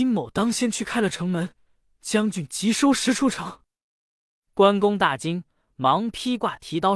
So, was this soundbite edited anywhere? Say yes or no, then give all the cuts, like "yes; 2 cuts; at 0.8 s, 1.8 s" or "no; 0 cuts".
no; 0 cuts